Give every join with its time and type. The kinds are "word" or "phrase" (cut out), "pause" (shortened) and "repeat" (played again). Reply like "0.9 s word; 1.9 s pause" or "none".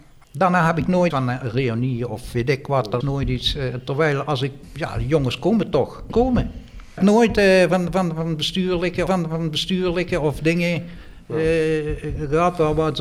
1.1 s word; 3.0 s word; 6.1 s word; 9.1 s repeat